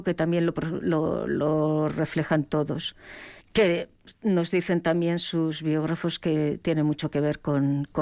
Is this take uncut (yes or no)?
no